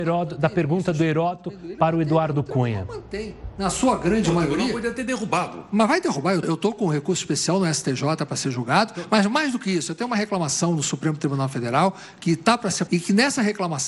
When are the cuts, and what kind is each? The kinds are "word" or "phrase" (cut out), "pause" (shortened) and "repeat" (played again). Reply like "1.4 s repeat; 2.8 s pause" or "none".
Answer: 6.4 s word; 12.9 s word